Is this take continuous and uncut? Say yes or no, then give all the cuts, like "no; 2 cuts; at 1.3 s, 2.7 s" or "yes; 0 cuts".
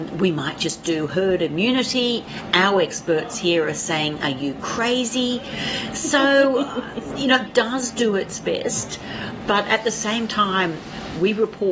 no; 1 cut; at 7.5 s